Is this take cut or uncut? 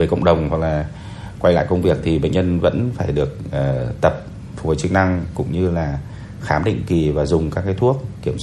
uncut